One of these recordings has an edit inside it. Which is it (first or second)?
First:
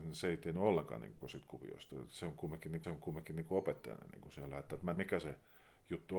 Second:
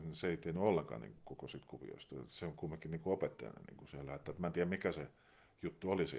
first